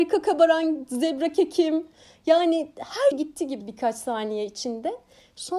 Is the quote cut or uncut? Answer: cut